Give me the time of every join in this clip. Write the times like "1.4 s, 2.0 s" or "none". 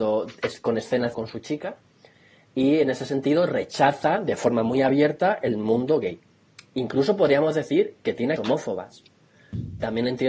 1.1 s, 8.4 s